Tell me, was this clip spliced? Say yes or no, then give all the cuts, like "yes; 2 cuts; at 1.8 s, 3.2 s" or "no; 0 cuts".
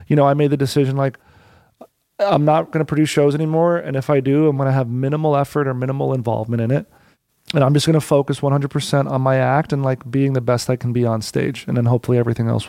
no; 0 cuts